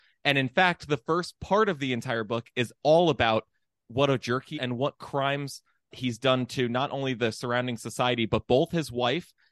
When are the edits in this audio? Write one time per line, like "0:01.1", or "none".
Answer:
0:04.5
0:05.9